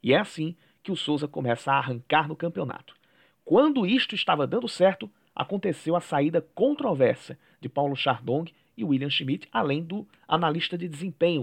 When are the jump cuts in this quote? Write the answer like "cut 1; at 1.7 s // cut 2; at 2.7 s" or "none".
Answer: none